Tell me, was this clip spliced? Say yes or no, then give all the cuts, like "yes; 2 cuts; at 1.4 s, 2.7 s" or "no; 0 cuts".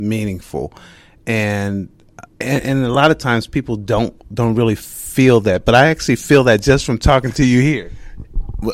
yes; 1 cut; at 2.3 s